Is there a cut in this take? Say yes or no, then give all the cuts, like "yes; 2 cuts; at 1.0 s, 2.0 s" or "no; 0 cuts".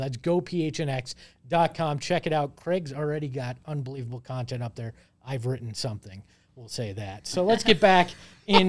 no; 0 cuts